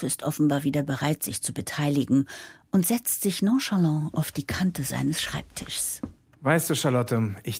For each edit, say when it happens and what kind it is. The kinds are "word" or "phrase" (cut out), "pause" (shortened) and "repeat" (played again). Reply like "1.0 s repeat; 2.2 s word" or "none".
none